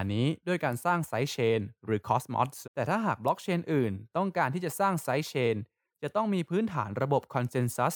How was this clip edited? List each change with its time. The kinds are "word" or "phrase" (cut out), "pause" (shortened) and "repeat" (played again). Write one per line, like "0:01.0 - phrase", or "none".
0:02.6 - word